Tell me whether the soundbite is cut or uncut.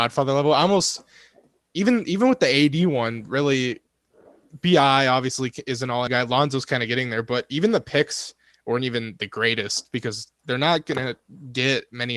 cut